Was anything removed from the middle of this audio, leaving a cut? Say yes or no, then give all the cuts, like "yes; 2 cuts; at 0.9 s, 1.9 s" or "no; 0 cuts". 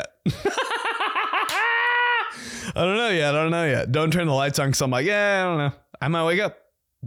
no; 0 cuts